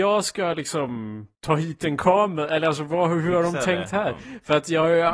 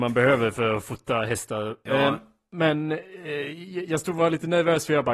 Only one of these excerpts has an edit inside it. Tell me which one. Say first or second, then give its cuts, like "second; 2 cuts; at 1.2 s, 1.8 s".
first; 1 cut; at 1.3 s